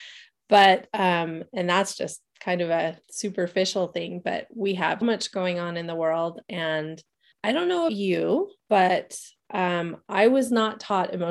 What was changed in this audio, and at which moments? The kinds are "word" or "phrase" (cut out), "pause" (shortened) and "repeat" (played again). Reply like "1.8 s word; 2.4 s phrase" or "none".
2.3 s pause; 3.0 s pause; 5.0 s word; 7.3 s word; 7.9 s word; 8.6 s pause